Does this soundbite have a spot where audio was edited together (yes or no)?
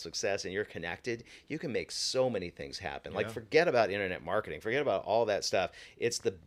no